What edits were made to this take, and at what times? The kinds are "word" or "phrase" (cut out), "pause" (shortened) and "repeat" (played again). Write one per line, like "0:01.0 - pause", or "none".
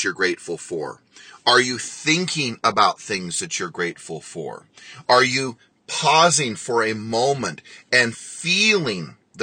none